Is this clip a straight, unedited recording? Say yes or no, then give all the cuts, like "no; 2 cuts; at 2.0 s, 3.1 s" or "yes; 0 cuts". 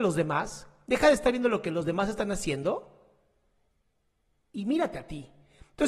yes; 0 cuts